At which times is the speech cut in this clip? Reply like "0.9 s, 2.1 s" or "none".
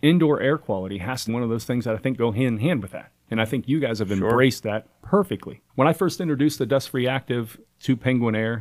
1.3 s, 5.7 s